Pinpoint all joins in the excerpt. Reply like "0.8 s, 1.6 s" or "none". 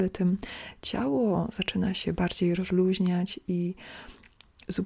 none